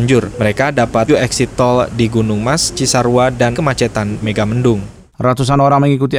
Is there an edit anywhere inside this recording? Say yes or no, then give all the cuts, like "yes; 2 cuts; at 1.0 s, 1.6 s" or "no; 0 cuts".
yes; 3 cuts; at 1.1 s, 3.5 s, 4.2 s